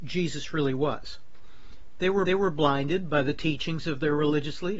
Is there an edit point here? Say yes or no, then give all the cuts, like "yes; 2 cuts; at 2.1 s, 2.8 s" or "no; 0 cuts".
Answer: yes; 1 cut; at 2.3 s